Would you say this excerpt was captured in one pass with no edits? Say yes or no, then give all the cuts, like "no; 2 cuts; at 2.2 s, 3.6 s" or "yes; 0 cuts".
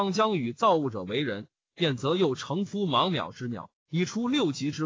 yes; 0 cuts